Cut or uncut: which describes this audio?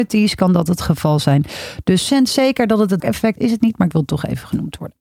cut